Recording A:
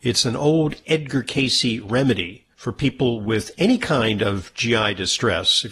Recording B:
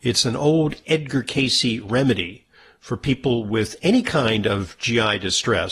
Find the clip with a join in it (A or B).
A